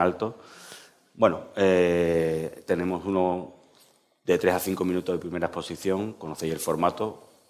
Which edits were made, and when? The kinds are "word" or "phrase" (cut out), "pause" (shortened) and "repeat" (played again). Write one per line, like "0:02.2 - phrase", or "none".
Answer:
none